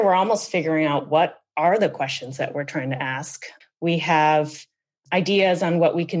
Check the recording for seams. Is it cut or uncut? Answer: uncut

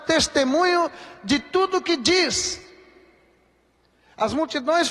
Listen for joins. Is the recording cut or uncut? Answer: uncut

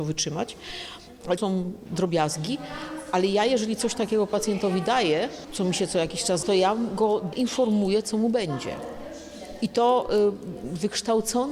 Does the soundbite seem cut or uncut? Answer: cut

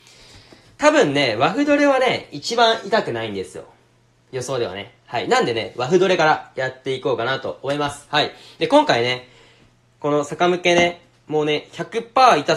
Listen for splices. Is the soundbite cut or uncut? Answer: uncut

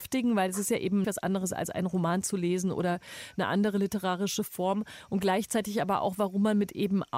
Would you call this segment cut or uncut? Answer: cut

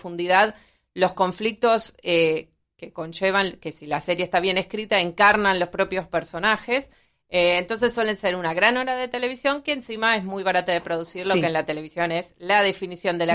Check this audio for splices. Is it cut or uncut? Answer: uncut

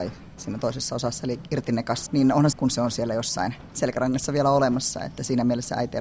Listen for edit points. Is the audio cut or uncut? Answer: cut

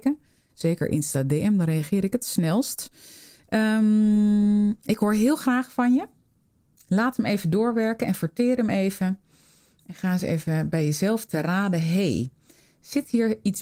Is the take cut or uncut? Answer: uncut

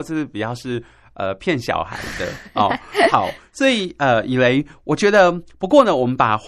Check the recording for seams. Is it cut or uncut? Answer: uncut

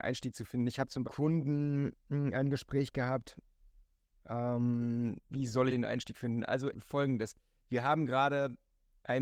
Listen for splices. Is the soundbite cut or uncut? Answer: cut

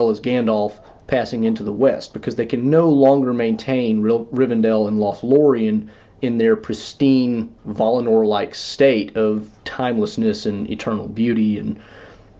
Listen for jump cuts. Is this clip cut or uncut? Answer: uncut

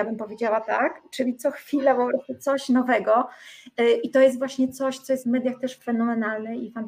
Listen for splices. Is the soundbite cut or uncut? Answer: cut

